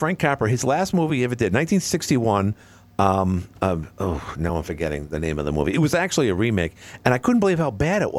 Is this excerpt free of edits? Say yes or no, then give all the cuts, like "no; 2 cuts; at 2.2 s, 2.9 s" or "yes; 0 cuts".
yes; 0 cuts